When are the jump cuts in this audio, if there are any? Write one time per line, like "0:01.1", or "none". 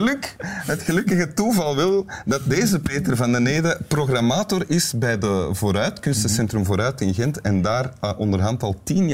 none